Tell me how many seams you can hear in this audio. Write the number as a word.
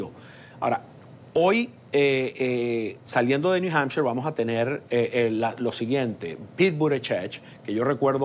zero